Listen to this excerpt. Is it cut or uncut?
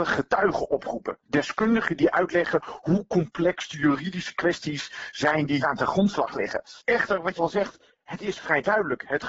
cut